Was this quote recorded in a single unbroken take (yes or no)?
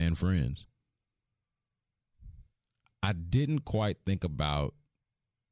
yes